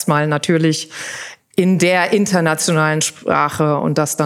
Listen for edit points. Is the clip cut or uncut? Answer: uncut